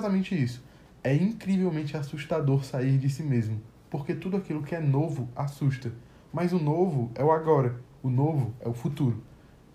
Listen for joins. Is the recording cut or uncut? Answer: uncut